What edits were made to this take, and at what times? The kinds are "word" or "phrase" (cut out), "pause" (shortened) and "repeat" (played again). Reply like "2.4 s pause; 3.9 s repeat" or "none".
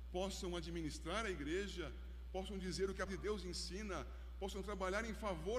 3.1 s word